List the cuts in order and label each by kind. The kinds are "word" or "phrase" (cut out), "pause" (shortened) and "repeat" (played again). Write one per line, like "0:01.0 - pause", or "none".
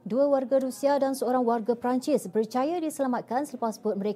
none